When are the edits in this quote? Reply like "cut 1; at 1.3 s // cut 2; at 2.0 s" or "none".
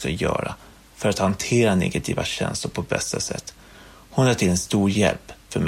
none